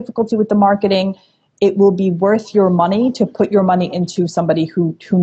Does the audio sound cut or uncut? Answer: uncut